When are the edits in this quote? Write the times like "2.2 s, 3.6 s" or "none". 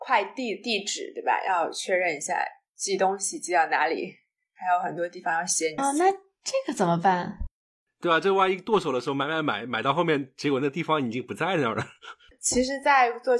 5.8 s